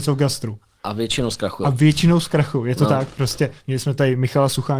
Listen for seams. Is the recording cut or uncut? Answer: uncut